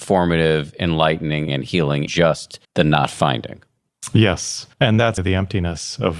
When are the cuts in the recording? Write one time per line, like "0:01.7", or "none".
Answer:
0:01.5
0:02.1
0:02.6
0:04.7
0:05.2